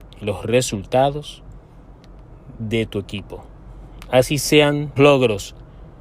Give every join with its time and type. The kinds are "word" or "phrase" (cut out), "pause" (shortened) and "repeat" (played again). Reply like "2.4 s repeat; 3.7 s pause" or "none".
5.0 s word